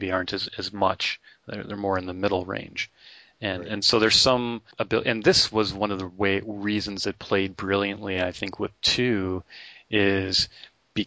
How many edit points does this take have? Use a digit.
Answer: 1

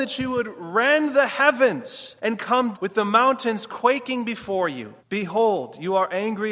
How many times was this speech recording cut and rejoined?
3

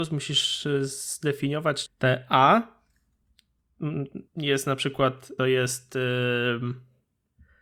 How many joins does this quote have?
3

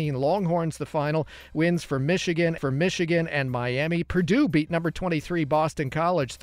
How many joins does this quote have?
1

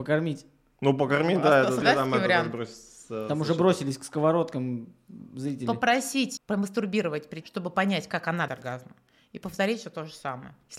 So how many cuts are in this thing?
4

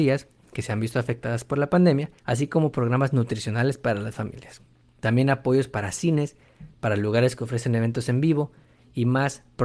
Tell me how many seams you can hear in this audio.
1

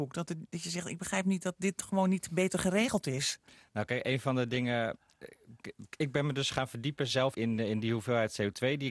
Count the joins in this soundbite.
1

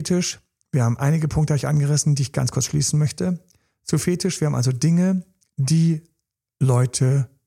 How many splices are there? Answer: 0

